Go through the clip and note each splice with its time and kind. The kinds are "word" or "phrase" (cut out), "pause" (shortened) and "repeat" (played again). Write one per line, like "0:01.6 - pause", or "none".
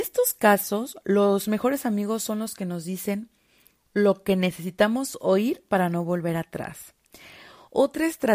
none